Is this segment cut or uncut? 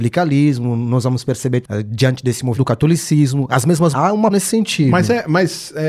cut